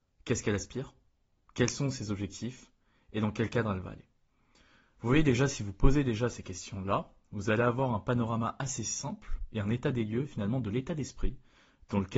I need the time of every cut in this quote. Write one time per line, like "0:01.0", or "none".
none